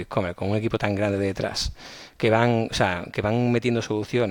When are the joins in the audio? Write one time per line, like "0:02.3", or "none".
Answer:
none